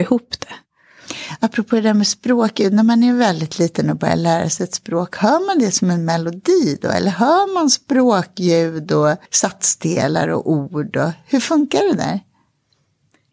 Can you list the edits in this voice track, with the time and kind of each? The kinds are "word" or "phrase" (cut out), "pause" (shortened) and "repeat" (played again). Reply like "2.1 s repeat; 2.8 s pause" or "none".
9.3 s pause